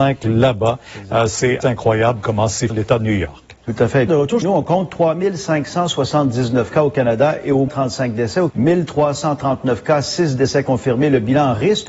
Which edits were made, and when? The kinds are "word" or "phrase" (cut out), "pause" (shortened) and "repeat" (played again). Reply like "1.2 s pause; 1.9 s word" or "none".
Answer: 1.6 s word; 2.7 s word; 4.1 s word; 4.4 s word; 7.7 s word; 8.5 s word